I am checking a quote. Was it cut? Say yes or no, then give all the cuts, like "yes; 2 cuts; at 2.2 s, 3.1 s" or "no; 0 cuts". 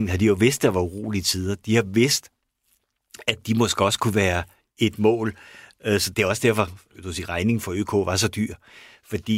yes; 1 cut; at 6.1 s